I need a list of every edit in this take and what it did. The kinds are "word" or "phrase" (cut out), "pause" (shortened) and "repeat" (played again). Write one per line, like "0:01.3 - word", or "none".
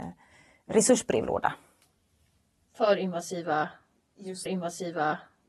0:04.5 - repeat